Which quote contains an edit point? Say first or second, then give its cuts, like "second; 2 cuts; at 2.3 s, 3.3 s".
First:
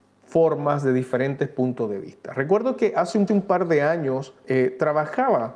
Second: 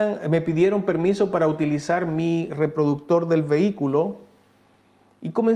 first; 2 cuts; at 3.3 s, 4.4 s